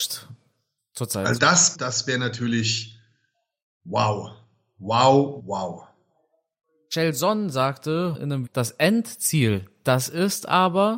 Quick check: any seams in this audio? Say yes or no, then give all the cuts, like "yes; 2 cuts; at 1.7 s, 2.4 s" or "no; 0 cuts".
yes; 5 cuts; at 1.4 s, 1.7 s, 5.4 s, 8.1 s, 8.5 s